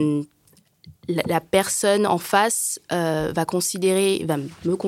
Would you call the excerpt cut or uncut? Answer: uncut